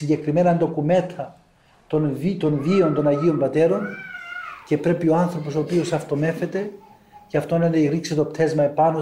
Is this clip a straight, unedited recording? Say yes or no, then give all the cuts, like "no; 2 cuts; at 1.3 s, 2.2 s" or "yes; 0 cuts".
yes; 0 cuts